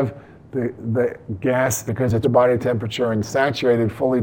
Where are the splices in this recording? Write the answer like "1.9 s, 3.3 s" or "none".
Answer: 1.9 s, 2.2 s